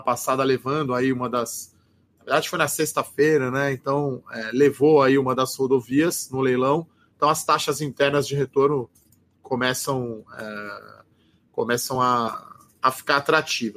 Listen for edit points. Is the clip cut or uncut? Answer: uncut